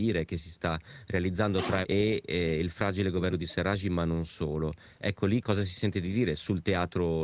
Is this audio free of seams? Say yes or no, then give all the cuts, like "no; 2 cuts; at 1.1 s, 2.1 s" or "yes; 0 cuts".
no; 3 cuts; at 1.8 s, 3.3 s, 5.4 s